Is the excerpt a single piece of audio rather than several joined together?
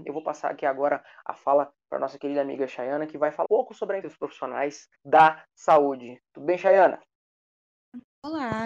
no; 3 cuts; at 3.4 s, 4.0 s, 4.9 s

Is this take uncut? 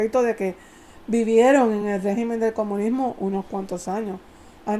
yes; 0 cuts

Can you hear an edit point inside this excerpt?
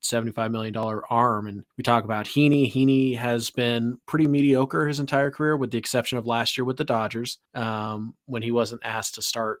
yes; 3 cuts; at 1.7 s, 4.0 s, 7.4 s

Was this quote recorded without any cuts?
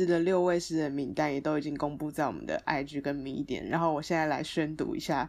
yes; 0 cuts

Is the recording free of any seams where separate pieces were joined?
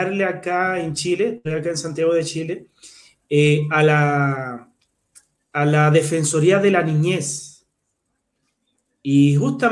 yes; 0 cuts

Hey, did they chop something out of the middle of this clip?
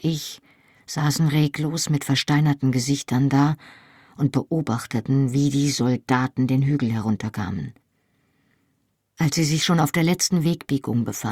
no; 0 cuts

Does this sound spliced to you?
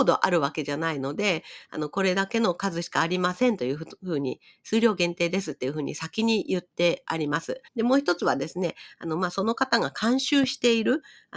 yes; 1 cut; at 7.7 s

